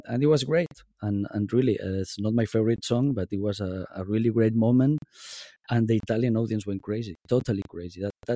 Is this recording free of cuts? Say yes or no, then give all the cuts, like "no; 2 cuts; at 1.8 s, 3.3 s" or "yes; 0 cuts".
yes; 0 cuts